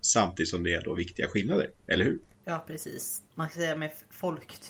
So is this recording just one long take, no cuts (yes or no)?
no